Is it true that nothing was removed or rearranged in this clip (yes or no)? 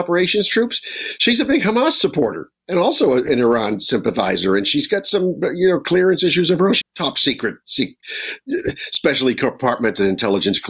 no